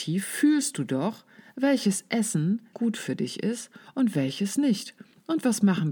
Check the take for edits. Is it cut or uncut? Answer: cut